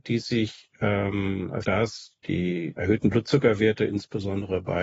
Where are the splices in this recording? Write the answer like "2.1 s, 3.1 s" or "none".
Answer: 1.6 s, 2.2 s, 2.8 s